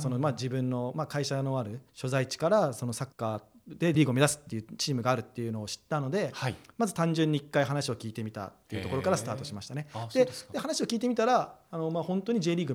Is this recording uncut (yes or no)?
no